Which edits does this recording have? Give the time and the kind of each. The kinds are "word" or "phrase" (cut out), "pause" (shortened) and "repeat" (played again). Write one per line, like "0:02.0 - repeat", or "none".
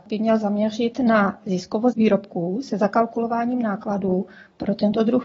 none

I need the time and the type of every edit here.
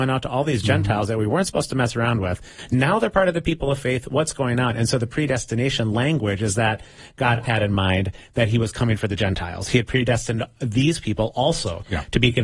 0:07.4 - word

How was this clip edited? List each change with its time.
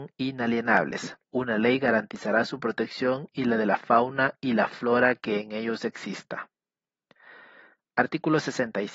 0:01.2 - pause

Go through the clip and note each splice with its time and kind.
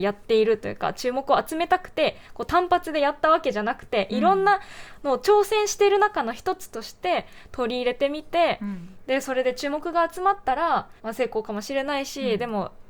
0:11.0 - pause

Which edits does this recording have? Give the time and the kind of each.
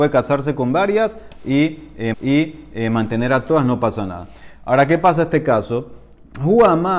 0:02.1 - repeat

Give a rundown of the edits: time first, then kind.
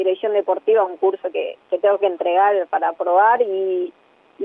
none

